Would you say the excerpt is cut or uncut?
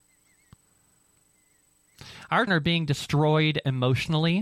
cut